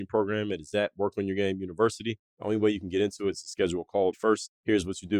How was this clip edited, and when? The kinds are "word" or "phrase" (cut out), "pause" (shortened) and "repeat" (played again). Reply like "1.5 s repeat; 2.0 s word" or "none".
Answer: 4.1 s word